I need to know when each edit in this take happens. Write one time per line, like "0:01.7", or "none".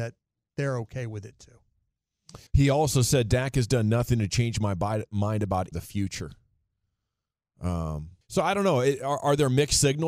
0:02.5
0:05.7
0:08.2